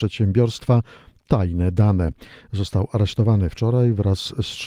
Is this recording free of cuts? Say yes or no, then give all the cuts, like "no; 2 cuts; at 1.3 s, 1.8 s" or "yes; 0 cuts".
yes; 0 cuts